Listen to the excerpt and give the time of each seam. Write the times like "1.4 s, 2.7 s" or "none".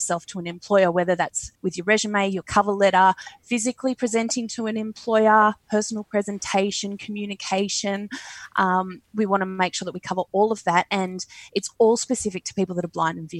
1.5 s